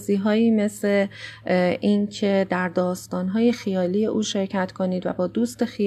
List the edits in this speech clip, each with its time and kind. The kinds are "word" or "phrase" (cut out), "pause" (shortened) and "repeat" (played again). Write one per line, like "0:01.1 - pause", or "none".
none